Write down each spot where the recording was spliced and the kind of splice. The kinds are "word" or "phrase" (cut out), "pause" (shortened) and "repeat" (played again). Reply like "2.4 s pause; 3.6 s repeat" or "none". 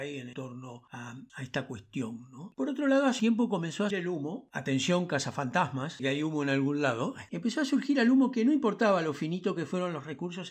3.2 s word; 3.9 s word; 6.0 s word